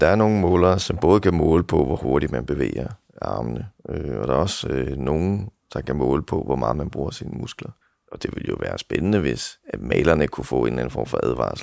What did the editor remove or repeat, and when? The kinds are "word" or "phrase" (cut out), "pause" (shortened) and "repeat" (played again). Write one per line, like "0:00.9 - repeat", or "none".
0:07.8 - pause